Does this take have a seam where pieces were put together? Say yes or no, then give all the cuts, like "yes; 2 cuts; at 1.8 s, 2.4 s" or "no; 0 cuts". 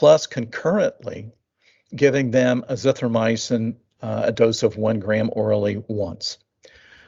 no; 0 cuts